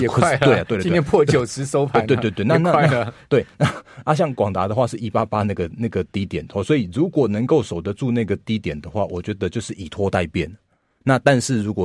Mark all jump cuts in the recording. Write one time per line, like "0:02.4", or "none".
none